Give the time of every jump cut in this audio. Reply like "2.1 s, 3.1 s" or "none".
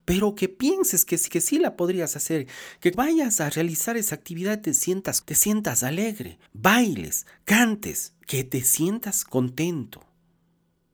1.3 s, 2.9 s, 5.2 s, 6.5 s, 8.2 s